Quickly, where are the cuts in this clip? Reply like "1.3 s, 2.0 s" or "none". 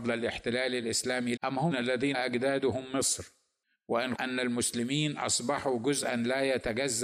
1.4 s, 1.7 s, 2.1 s, 4.2 s